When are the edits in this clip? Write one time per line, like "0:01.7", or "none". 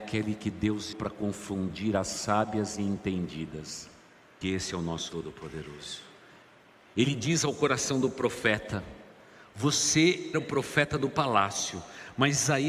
0:00.9
0:04.4
0:05.1
0:10.3